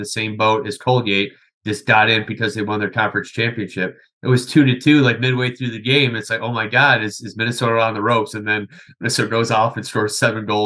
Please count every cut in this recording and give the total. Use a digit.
0